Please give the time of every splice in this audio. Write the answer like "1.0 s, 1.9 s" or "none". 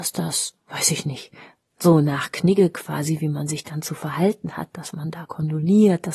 none